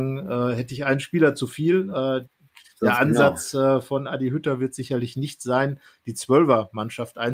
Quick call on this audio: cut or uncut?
uncut